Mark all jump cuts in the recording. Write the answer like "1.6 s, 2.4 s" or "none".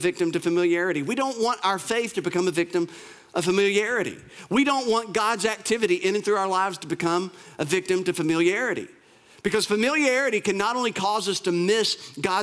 none